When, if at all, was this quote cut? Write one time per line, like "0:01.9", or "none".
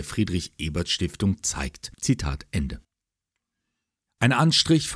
0:01.9

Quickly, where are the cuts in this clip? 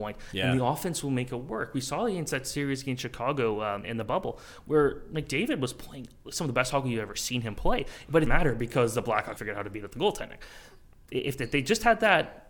0:03.8
0:08.3
0:09.4

